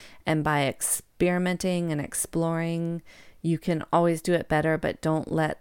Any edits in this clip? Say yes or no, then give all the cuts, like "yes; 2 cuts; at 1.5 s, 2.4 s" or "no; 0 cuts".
no; 0 cuts